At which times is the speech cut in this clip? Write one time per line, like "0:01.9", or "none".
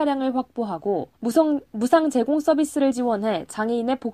0:01.1